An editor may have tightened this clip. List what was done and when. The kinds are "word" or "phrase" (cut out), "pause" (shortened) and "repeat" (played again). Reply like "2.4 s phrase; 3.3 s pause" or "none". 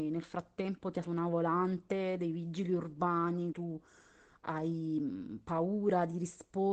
1.0 s word; 3.5 s word